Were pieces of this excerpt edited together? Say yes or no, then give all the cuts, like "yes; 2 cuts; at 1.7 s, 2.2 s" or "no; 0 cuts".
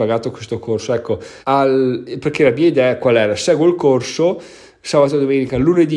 yes; 1 cut; at 1.4 s